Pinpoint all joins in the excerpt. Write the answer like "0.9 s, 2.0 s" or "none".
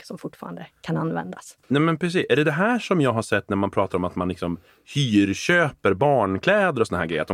1.6 s